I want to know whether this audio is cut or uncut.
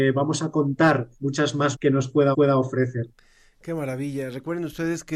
cut